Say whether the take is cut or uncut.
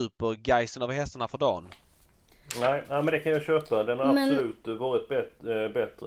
uncut